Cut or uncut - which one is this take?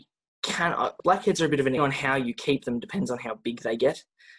cut